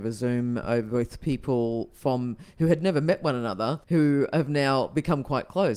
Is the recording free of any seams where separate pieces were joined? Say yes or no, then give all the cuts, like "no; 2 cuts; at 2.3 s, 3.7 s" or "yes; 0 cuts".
no; 1 cut; at 3.8 s